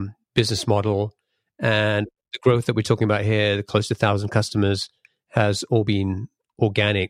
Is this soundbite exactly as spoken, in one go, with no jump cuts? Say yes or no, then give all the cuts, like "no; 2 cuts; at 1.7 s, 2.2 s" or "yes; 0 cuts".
yes; 0 cuts